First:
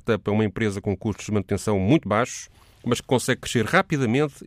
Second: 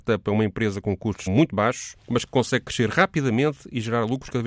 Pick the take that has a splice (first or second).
second